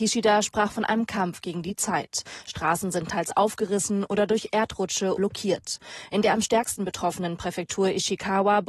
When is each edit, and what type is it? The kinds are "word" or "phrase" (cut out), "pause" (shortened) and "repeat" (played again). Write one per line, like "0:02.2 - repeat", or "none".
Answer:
0:05.2 - phrase